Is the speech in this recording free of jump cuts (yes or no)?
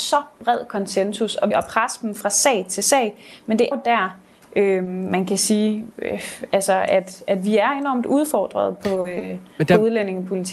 no